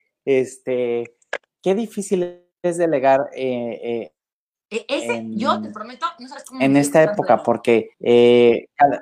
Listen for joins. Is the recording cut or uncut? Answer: cut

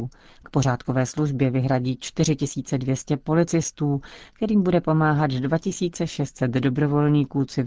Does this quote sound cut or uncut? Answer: uncut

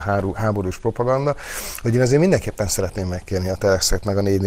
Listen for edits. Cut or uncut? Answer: uncut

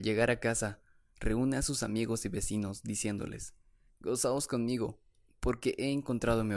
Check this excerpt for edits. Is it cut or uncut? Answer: uncut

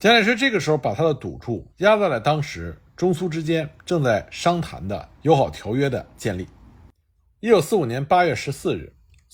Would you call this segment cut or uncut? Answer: cut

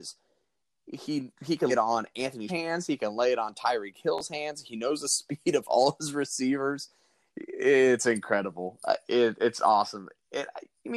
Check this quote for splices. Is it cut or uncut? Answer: cut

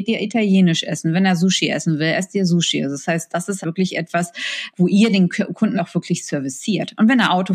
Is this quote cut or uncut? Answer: cut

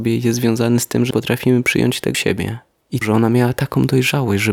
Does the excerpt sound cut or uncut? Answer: cut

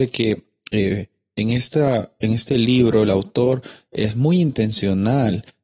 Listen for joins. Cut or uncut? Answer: uncut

